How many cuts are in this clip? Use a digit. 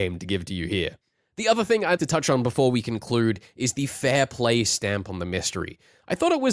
1